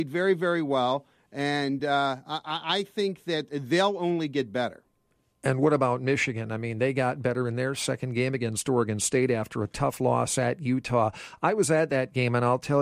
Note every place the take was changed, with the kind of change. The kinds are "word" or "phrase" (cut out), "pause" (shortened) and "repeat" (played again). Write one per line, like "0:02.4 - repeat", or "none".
none